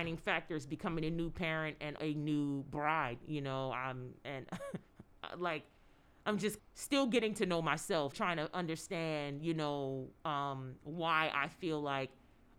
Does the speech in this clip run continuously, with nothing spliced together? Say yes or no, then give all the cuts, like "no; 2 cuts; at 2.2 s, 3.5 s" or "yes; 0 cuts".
no; 3 cuts; at 2.0 s, 6.6 s, 8.1 s